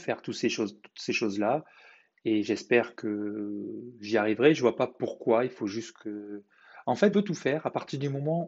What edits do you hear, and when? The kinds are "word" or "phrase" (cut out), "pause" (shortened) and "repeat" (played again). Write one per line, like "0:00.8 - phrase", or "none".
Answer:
0:07.1 - phrase